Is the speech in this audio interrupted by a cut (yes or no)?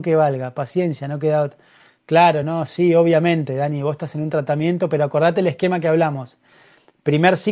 no